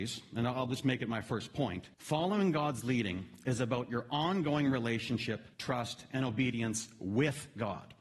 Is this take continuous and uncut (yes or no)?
no